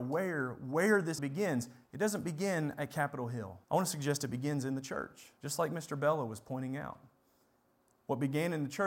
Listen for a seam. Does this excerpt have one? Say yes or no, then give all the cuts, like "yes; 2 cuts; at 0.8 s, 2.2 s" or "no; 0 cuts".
yes; 3 cuts; at 1.2 s, 3.6 s, 5.4 s